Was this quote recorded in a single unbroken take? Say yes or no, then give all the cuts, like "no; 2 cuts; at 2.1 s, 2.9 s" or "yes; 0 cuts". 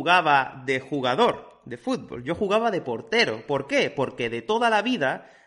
yes; 0 cuts